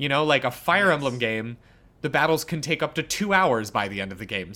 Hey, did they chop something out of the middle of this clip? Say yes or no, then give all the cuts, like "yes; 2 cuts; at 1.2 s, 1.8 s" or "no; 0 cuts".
no; 0 cuts